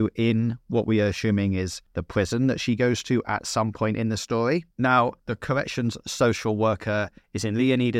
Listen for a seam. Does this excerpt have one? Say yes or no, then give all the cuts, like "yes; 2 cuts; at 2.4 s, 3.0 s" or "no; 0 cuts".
yes; 1 cut; at 4.7 s